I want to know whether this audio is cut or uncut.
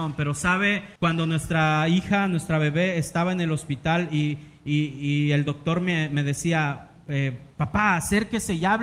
cut